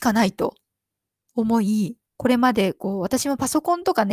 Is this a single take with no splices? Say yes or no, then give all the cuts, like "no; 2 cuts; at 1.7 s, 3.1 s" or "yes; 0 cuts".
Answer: no; 1 cut; at 2.0 s